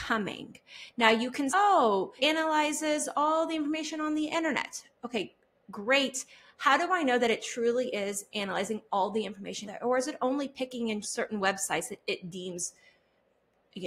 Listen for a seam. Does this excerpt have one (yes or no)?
yes